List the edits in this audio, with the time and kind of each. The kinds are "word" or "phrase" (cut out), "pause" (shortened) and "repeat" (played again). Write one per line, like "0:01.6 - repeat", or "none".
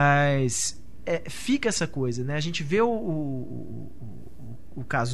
0:01.0 - word